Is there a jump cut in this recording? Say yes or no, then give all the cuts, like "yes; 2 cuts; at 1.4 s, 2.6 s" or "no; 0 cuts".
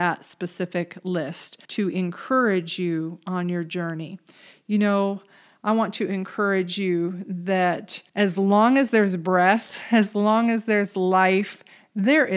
yes; 2 cuts; at 1.6 s, 8.1 s